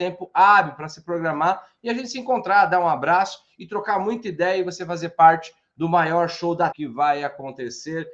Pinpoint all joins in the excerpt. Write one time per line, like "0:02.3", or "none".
0:06.7